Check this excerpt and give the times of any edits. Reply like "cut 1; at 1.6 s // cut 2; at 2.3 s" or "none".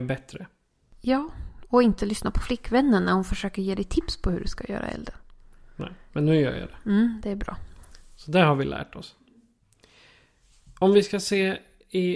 none